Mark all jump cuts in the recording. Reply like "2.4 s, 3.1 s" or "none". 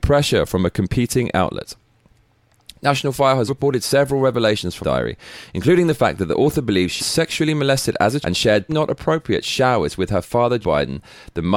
3.5 s, 4.8 s, 7.0 s, 8.2 s, 8.7 s, 10.6 s